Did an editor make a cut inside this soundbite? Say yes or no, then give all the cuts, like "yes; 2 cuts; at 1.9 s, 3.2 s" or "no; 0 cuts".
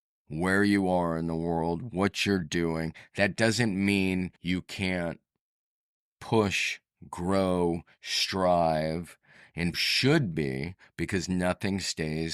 yes; 2 cuts; at 4.4 s, 9.7 s